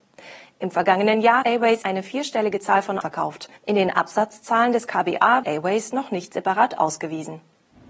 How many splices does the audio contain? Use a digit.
5